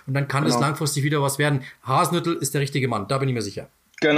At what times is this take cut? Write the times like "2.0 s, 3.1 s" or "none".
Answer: none